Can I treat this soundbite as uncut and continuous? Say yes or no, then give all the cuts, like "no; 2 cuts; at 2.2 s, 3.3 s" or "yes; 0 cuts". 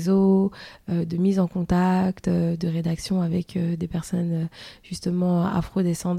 yes; 0 cuts